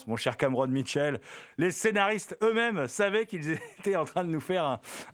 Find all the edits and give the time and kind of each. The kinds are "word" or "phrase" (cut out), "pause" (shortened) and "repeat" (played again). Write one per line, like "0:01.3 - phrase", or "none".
none